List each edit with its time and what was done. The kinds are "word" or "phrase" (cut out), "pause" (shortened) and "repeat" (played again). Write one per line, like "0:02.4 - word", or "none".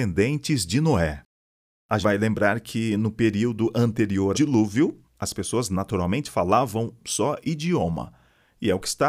0:02.0 - word
0:04.3 - word
0:05.0 - pause
0:07.0 - word

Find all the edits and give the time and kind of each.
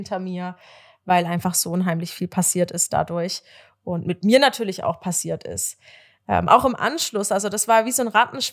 none

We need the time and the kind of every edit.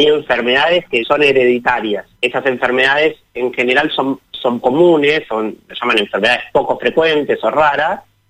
0:01.0 - word
0:02.2 - pause
0:04.6 - word

